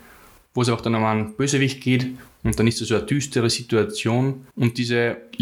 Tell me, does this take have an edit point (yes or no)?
yes